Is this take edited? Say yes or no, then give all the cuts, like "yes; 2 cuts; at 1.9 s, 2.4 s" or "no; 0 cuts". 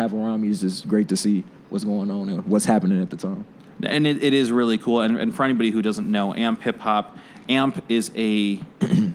no; 0 cuts